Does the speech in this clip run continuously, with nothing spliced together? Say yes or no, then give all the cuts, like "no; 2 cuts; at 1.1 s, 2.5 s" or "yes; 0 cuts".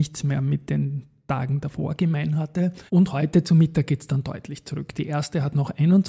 no; 1 cut; at 2.9 s